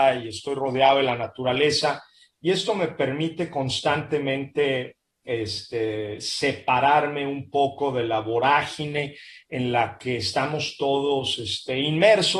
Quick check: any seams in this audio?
no; 0 cuts

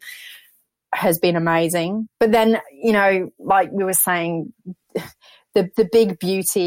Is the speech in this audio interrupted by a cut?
no; 0 cuts

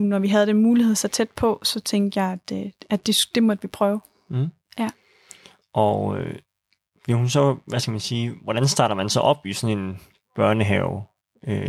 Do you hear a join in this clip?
no; 0 cuts

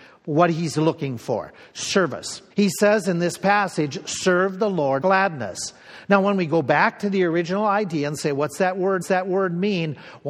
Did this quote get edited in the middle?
yes; 3 cuts; at 2.5 s, 5.0 s, 9.0 s

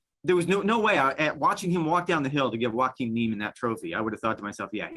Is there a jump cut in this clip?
no; 0 cuts

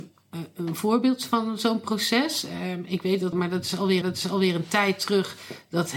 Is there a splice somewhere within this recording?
yes; 2 cuts; at 3.3 s, 4.0 s

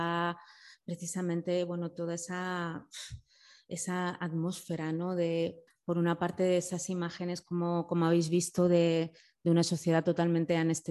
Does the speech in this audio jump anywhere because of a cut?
yes; 1 cut; at 5.7 s

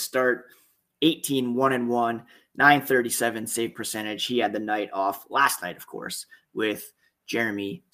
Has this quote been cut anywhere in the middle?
no; 0 cuts

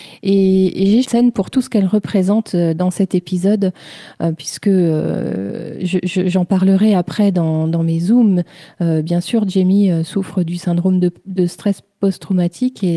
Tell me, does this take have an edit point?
yes; 1 cut; at 1.0 s

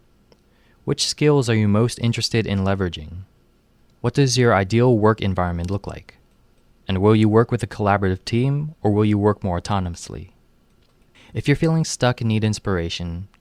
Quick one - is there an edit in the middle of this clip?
no; 0 cuts

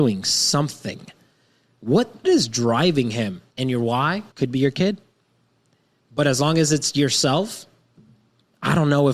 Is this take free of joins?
no; 3 cuts; at 2.2 s, 3.5 s, 4.3 s

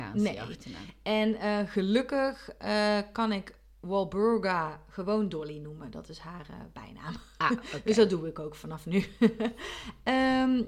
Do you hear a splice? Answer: no; 0 cuts

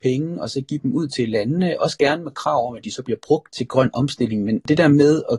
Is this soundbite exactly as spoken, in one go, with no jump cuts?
yes; 0 cuts

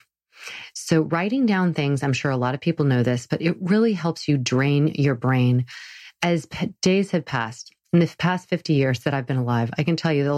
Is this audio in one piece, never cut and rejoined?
yes; 0 cuts

